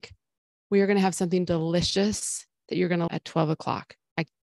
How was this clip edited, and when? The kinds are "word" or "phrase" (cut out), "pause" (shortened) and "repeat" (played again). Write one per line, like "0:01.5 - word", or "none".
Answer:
0:03.1 - word